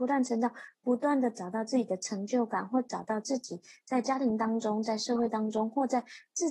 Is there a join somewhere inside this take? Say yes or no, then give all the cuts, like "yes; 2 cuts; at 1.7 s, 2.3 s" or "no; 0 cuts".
no; 0 cuts